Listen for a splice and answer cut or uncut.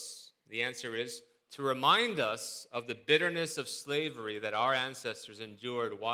uncut